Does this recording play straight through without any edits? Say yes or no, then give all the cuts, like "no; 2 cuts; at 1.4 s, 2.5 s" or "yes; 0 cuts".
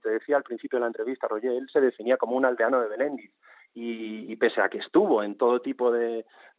yes; 0 cuts